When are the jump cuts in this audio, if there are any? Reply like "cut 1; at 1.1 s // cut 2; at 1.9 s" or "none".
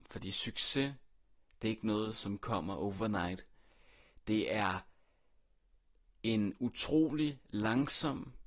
none